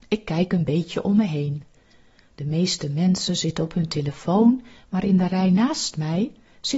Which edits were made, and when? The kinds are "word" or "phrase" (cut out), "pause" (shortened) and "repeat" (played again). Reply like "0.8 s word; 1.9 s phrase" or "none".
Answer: none

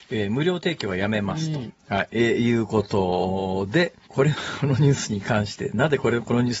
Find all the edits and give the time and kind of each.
1.8 s pause; 4.0 s pause

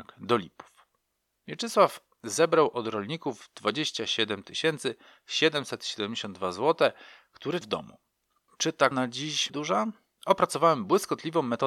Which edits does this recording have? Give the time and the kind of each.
7.6 s word; 8.9 s word; 9.5 s word

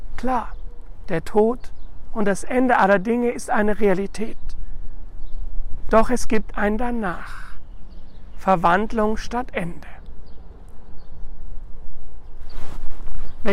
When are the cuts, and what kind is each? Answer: none

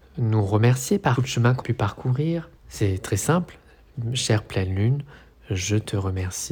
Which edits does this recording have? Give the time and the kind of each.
1.2 s phrase; 1.6 s word; 2.6 s pause

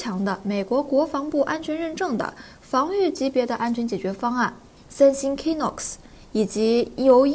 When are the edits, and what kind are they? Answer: 4.8 s pause

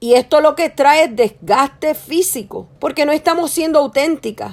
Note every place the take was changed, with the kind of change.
2.8 s pause

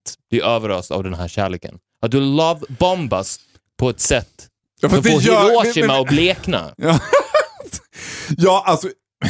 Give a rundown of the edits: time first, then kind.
none

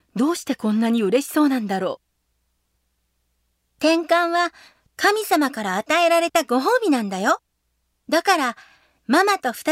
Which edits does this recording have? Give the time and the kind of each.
none

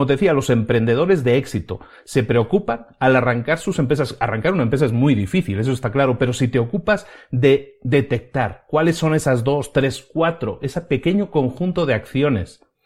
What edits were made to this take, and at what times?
none

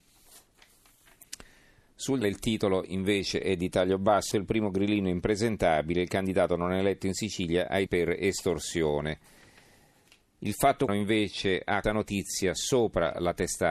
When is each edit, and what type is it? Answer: 2.2 s word; 4.3 s word; 7.9 s word; 10.9 s word; 11.8 s word

